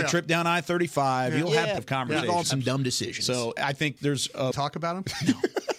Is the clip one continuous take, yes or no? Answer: no